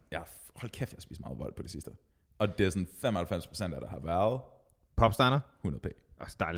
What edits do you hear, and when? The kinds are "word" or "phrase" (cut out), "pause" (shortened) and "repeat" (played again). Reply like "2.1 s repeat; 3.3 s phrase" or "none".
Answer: none